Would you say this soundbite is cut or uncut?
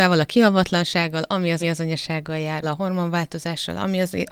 cut